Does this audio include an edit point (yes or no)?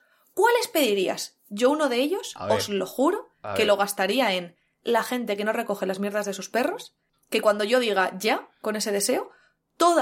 no